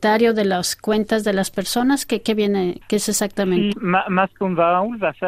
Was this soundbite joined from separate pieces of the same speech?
yes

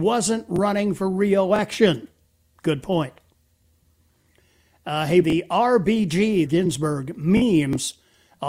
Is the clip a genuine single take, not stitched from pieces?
no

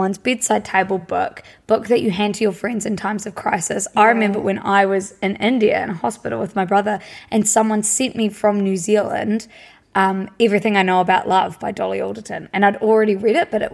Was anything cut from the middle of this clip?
no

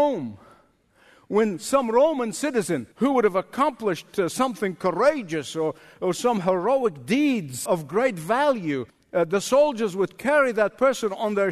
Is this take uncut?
no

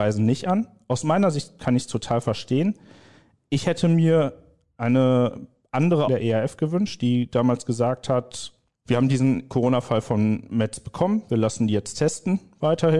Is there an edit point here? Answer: yes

